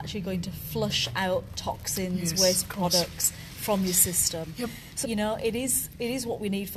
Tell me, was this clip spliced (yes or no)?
yes